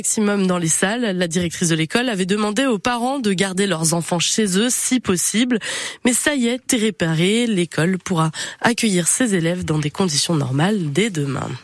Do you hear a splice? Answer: yes; 1 cut; at 6.7 s

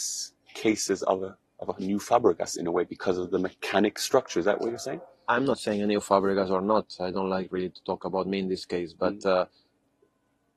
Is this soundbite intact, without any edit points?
no; 1 cut; at 1.5 s

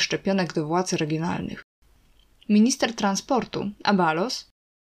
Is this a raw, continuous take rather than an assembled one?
yes; 0 cuts

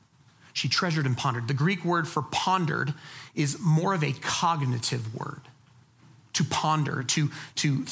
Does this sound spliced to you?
no; 0 cuts

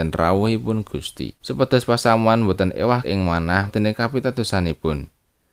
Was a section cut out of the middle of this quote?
yes; 3 cuts; at 1.4 s, 3.0 s, 3.7 s

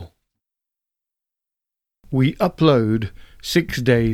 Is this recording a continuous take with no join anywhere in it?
yes; 0 cuts

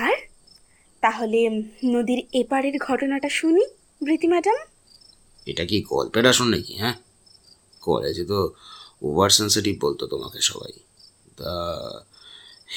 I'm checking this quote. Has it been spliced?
no; 0 cuts

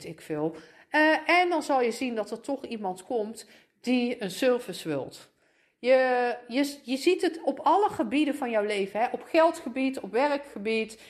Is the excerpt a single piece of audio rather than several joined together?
yes; 0 cuts

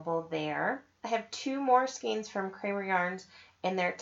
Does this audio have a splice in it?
no; 0 cuts

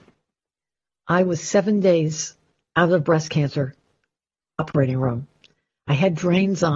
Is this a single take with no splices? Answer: yes; 0 cuts

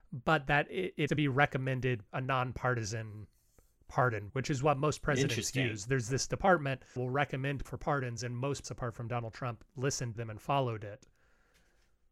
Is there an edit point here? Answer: yes; 7 cuts; at 1.1 s, 2.1 s, 4.3 s, 7.0 s, 7.6 s, 8.6 s, 10.1 s

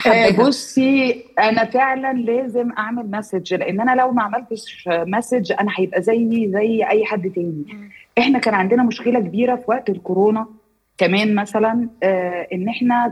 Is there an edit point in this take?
no; 0 cuts

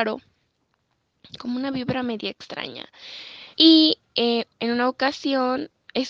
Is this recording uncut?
no; 1 cut; at 3.5 s

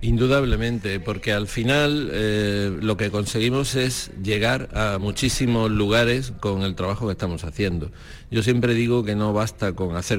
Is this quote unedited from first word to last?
yes; 0 cuts

